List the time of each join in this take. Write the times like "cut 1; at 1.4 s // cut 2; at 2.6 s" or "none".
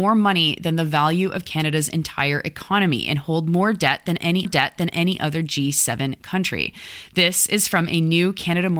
cut 1; at 4.4 s